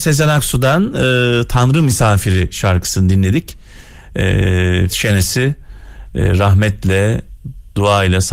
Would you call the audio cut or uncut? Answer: cut